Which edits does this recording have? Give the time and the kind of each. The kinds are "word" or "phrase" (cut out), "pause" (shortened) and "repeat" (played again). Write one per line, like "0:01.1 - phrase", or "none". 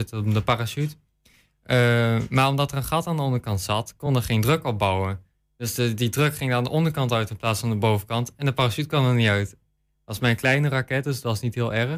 none